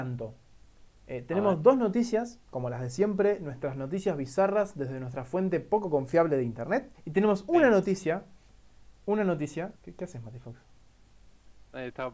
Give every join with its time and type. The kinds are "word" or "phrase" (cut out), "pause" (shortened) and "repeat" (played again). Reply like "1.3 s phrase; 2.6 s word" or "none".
2.4 s pause; 6.9 s pause; 9.8 s pause